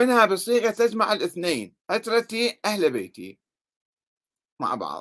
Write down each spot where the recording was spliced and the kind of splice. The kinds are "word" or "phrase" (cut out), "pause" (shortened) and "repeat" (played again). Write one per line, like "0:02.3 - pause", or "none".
0:01.8 - pause

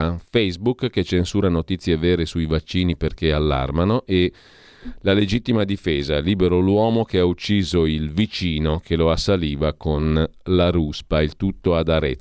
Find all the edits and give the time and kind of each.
none

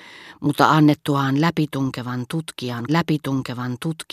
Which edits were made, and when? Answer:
0:02.9 - repeat

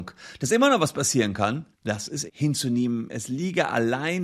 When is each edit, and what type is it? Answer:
0:01.7 - pause
0:02.3 - word

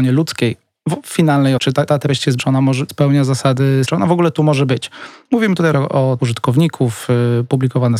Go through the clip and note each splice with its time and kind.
0:01.6 - word
0:01.9 - word
0:02.4 - word
0:02.9 - word
0:03.8 - word
0:05.7 - word
0:06.2 - word

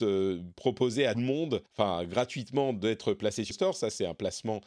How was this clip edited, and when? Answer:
0:01.1 - word
0:01.7 - pause
0:03.5 - word

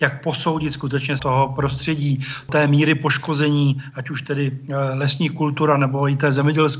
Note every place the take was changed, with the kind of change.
0:01.2 - word

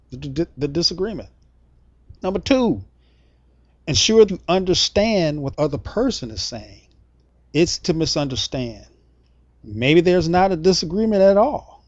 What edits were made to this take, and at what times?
0:02.2 - pause
0:04.3 - word
0:05.5 - word
0:07.8 - word

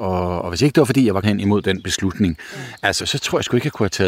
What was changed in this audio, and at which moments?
0:01.2 - word
0:03.0 - word

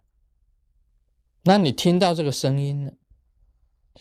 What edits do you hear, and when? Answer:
none

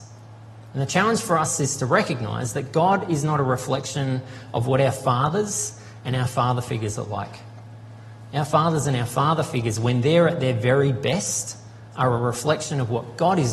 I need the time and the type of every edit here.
none

